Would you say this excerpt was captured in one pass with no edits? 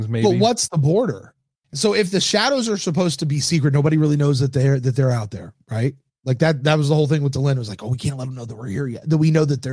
yes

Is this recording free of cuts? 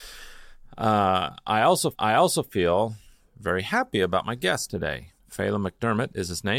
no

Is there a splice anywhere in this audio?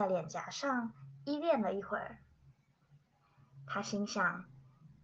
no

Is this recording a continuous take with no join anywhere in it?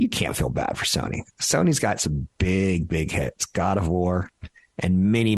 yes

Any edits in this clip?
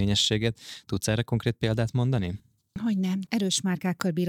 no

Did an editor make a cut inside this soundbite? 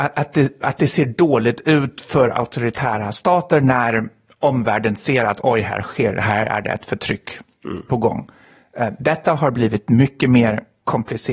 no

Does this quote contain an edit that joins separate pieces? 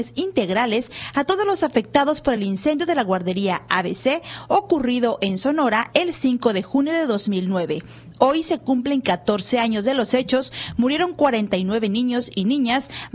no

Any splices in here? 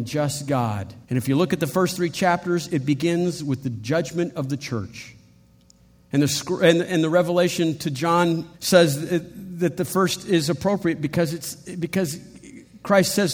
yes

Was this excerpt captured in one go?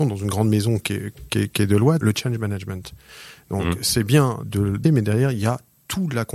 no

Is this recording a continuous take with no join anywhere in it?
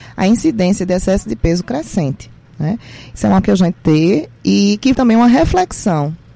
no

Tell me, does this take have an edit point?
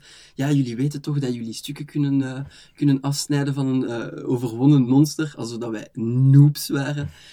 no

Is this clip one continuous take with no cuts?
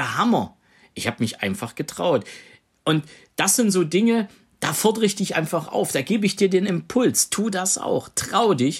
yes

